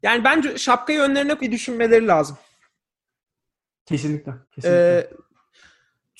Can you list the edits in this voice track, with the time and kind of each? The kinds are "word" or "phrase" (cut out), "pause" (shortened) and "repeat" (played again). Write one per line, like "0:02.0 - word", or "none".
0:01.4 - word
0:04.4 - pause